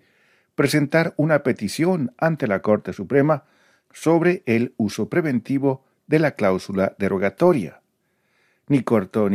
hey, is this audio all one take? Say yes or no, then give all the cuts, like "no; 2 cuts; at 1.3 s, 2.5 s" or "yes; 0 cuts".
yes; 0 cuts